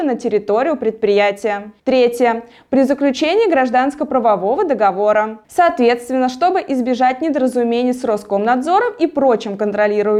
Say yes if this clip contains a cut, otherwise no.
yes